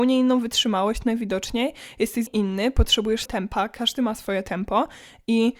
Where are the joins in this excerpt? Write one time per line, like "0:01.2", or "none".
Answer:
0:02.3
0:03.3